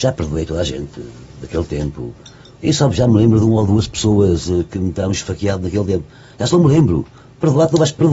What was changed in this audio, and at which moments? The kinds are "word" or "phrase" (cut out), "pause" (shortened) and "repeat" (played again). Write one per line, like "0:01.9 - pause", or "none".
none